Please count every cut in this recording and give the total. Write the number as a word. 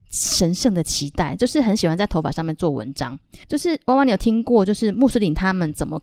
one